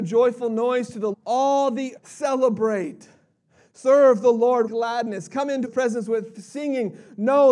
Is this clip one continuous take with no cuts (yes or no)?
no